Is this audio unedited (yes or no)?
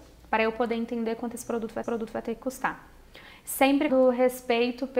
no